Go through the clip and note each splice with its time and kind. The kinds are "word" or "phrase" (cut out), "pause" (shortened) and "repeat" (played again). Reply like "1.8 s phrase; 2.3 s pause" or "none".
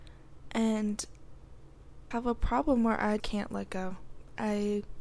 2.1 s word; 3.2 s word